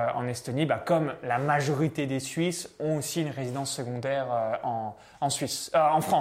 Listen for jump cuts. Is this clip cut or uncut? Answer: uncut